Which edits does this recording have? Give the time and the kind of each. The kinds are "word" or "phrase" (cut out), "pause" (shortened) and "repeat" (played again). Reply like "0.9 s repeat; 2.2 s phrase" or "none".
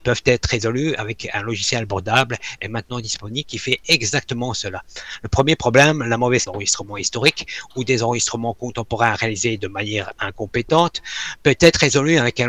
6.5 s phrase